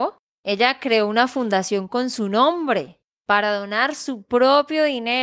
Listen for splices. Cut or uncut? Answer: uncut